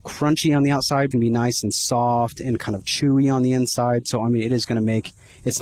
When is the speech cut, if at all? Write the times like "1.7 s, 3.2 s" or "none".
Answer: 1.1 s